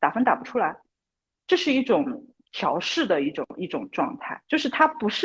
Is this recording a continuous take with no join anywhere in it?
yes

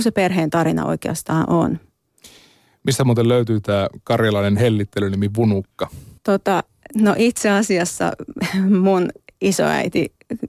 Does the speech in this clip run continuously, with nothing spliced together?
no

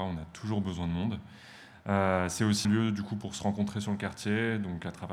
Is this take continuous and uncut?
no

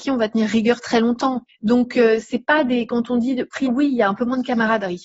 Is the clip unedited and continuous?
no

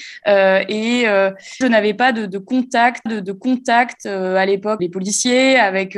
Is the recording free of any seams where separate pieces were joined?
no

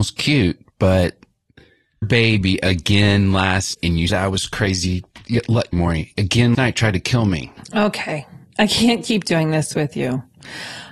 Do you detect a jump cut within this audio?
yes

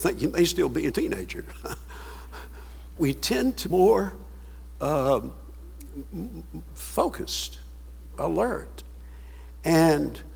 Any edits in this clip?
yes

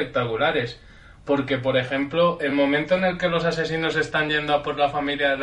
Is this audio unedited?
yes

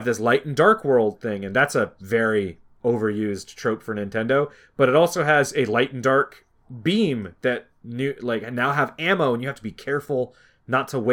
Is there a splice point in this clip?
no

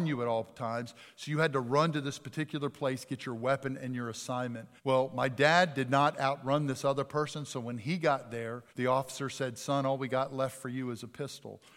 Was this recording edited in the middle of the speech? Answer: yes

